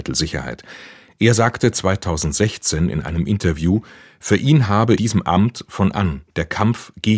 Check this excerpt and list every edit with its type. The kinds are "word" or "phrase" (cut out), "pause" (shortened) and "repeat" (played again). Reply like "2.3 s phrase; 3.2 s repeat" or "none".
5.0 s word; 5.9 s word